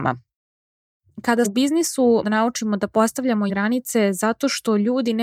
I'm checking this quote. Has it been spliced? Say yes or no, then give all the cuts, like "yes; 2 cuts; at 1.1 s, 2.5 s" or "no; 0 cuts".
yes; 3 cuts; at 1.4 s, 2.2 s, 3.5 s